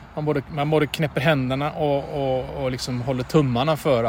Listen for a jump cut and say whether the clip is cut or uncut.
uncut